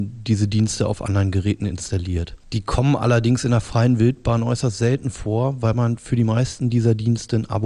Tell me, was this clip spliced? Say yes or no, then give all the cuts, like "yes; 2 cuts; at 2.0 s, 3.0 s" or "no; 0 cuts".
no; 0 cuts